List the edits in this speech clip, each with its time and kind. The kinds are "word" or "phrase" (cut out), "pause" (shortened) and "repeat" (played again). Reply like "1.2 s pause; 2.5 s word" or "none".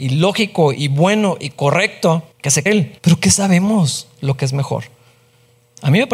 2.3 s pause; 2.7 s word; 3.0 s pause